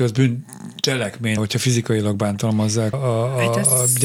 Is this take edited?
yes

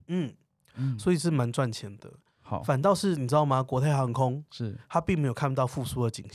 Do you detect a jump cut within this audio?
no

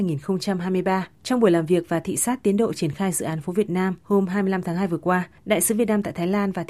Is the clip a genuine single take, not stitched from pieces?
no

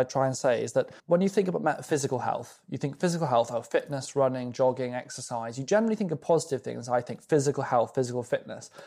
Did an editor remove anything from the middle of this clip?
yes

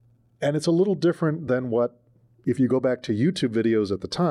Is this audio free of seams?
yes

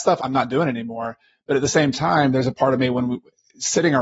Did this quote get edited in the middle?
no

